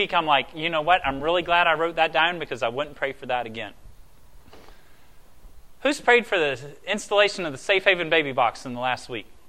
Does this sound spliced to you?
no; 0 cuts

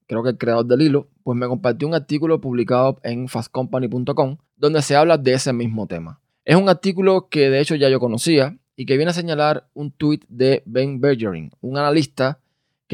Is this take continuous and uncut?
no; 2 cuts; at 4.5 s, 6.3 s

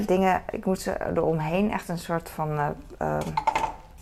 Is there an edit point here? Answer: no; 0 cuts

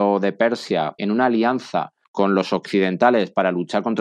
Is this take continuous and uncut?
no; 2 cuts; at 1.0 s, 2.0 s

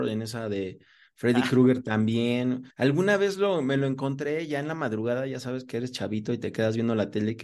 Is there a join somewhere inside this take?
yes; 1 cut; at 2.7 s

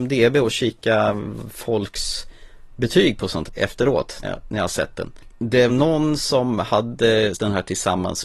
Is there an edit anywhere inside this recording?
yes; 4 cuts; at 3.5 s, 4.2 s, 5.7 s, 7.3 s

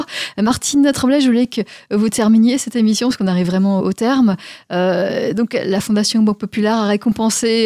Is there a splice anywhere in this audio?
yes; 1 cut; at 3.8 s

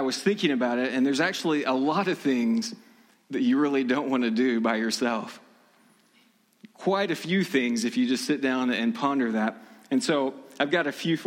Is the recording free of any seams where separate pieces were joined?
yes; 0 cuts

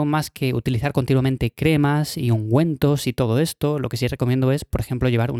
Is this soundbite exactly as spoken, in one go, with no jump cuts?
yes; 0 cuts

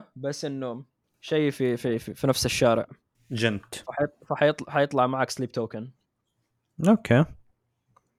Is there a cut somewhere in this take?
yes; 2 cuts; at 1.0 s, 3.1 s

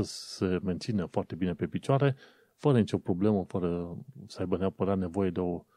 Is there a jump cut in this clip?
no; 0 cuts

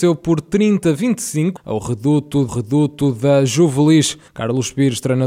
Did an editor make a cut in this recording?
yes; 3 cuts; at 1.6 s, 2.5 s, 4.3 s

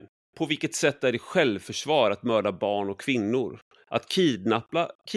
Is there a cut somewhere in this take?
no; 0 cuts

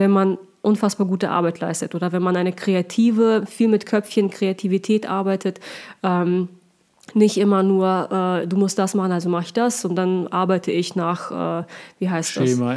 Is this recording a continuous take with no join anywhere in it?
yes; 0 cuts

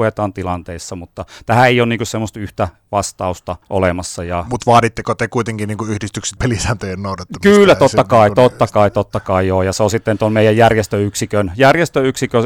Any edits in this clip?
yes; 2 cuts; at 3.6 s, 6.4 s

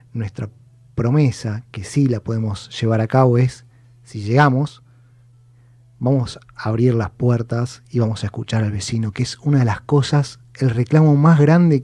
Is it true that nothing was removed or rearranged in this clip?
yes; 0 cuts

